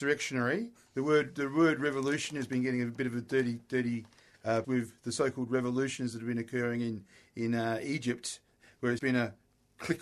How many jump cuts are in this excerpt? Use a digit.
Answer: 2